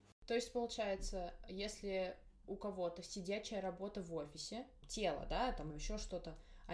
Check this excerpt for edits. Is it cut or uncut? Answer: cut